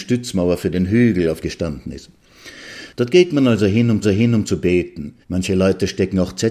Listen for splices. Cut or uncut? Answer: cut